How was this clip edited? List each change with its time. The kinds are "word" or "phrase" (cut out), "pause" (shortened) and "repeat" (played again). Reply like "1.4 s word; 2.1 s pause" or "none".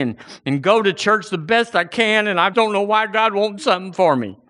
2.5 s word; 3.6 s word